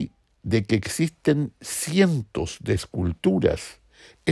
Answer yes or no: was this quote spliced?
no